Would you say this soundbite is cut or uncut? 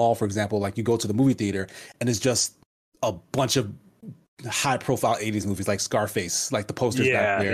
uncut